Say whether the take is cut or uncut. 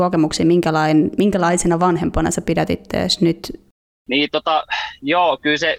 uncut